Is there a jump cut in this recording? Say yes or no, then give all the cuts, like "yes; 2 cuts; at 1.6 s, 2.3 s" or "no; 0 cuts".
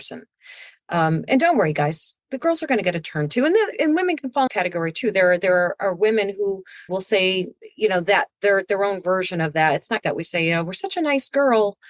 yes; 5 cuts; at 2.2 s, 3.7 s, 4.5 s, 6.9 s, 10.0 s